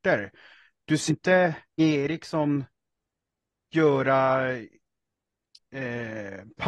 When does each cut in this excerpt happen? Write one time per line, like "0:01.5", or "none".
0:01.1
0:01.8